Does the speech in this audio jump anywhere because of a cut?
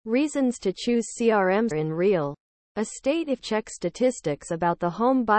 yes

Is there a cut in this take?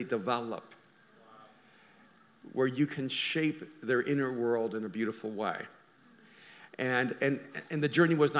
yes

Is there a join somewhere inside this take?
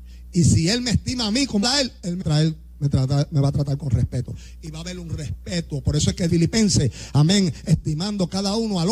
yes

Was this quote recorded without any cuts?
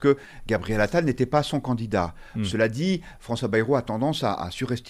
yes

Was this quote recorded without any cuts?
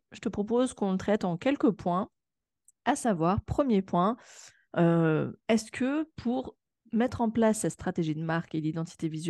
yes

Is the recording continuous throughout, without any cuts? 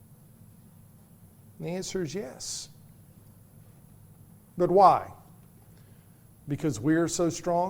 yes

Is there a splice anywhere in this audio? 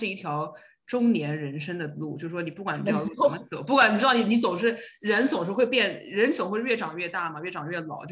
no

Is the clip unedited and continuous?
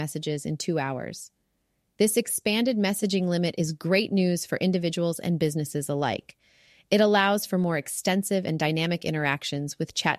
yes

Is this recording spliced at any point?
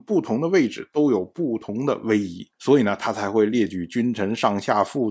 yes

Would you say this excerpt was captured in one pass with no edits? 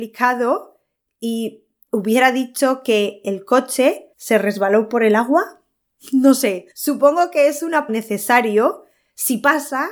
no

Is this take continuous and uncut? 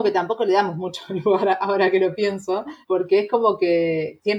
no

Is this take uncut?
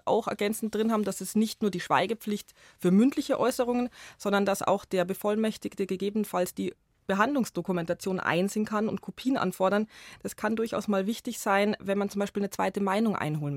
yes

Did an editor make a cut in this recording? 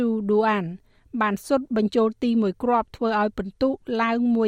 no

